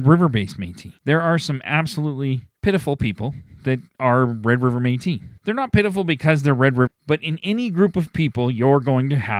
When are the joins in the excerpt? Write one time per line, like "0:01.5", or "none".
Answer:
0:01.0
0:02.6
0:05.4
0:06.9